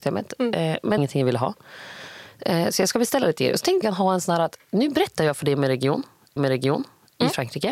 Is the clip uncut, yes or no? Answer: no